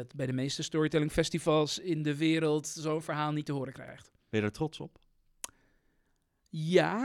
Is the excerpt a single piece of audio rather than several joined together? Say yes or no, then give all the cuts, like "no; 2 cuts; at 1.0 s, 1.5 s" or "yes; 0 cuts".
no; 1 cut; at 4.2 s